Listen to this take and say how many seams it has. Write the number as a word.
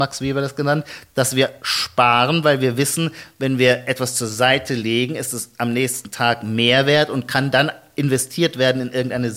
zero